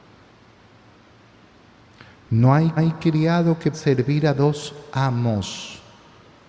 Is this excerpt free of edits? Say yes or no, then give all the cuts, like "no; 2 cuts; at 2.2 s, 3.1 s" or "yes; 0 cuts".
no; 2 cuts; at 2.8 s, 3.7 s